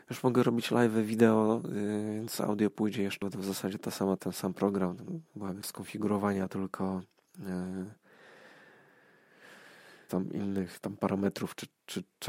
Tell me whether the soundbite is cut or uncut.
cut